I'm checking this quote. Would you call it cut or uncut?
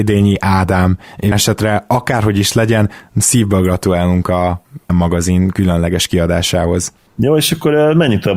cut